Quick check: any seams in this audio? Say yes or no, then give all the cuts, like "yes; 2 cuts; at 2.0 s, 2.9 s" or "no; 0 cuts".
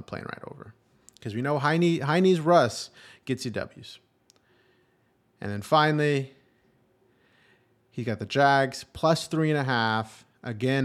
no; 0 cuts